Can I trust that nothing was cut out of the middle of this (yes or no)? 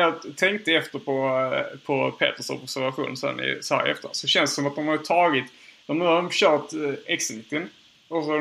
yes